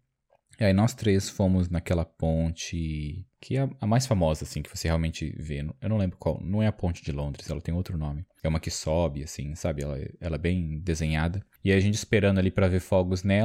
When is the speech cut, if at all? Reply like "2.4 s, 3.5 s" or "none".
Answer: 3.4 s